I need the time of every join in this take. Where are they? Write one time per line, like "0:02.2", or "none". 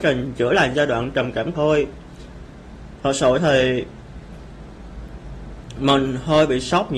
0:01.5